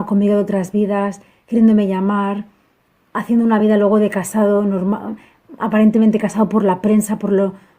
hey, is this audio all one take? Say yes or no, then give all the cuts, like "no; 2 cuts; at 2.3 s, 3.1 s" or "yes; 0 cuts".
yes; 0 cuts